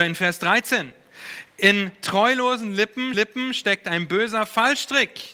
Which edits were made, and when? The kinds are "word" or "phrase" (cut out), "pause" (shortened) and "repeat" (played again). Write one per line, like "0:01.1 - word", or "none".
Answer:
0:03.1 - repeat